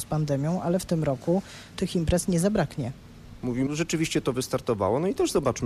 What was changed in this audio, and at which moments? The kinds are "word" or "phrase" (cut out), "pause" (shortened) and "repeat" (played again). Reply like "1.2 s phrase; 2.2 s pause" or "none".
1.7 s word; 3.7 s phrase